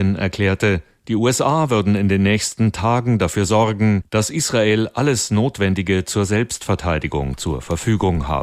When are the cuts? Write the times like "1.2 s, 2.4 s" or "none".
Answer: none